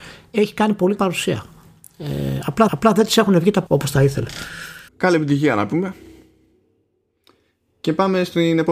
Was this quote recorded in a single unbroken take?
no; 4 cuts; at 1.0 s, 2.7 s, 3.7 s, 4.9 s

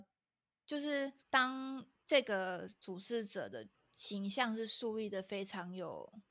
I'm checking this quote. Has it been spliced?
yes; 2 cuts; at 1.2 s, 3.7 s

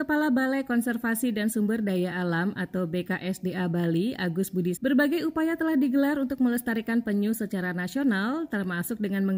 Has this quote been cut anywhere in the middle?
yes; 1 cut; at 4.8 s

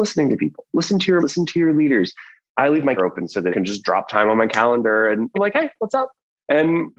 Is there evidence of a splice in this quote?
yes; 4 cuts; at 1.2 s, 3.0 s, 3.5 s, 5.3 s

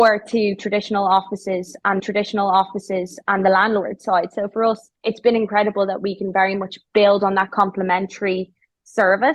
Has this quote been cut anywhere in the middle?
yes; 2 cuts; at 2.0 s, 5.0 s

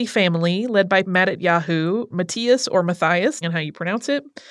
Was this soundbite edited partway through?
yes; 3 cuts; at 1.0 s, 2.1 s, 3.4 s

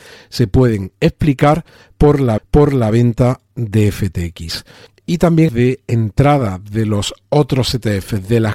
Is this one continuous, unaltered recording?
no; 3 cuts; at 2.4 s, 4.9 s, 5.5 s

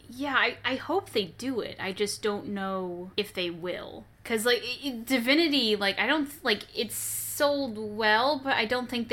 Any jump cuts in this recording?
yes; 2 cuts; at 3.1 s, 4.1 s

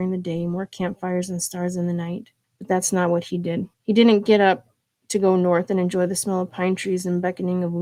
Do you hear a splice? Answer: yes; 3 cuts; at 2.4 s, 3.7 s, 4.8 s

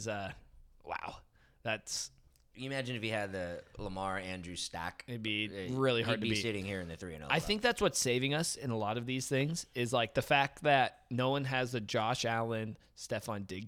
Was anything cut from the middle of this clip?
no; 0 cuts

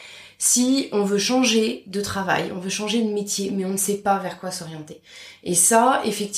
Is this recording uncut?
yes; 0 cuts

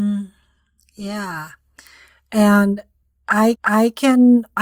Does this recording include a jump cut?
yes; 1 cut; at 3.5 s

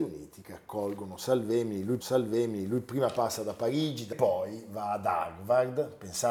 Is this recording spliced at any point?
yes; 2 cuts; at 2.0 s, 4.1 s

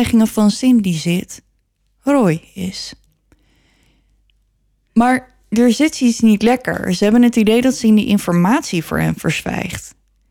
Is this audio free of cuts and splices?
yes; 0 cuts

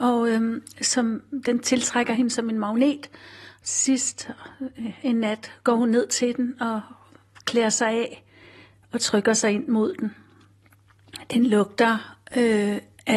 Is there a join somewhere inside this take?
no; 0 cuts

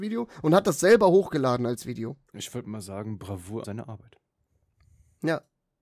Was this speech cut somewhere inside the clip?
yes; 2 cuts; at 2.3 s, 3.6 s

